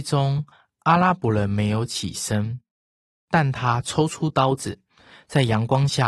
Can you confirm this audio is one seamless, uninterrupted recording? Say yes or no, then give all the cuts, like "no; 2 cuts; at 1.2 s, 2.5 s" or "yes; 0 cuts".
yes; 0 cuts